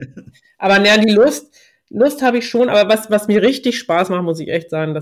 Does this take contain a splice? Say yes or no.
no